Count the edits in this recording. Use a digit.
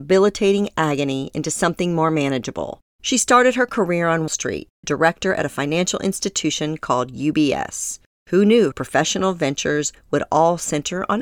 3